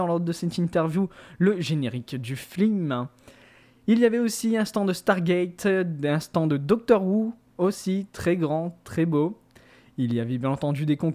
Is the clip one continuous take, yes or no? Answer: yes